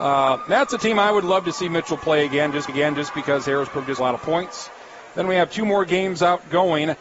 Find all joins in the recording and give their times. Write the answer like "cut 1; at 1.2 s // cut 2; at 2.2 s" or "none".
cut 1; at 2.7 s // cut 2; at 4.0 s